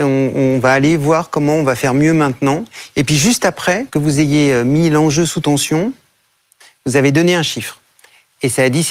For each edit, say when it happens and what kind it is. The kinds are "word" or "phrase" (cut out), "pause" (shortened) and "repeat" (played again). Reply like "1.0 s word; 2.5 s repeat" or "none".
3.9 s pause